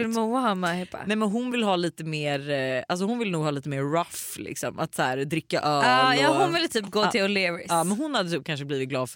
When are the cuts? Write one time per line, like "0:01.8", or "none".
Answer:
none